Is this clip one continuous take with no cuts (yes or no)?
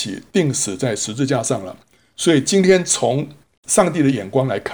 no